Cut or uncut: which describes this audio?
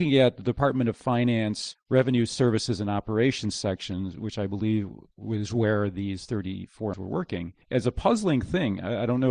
cut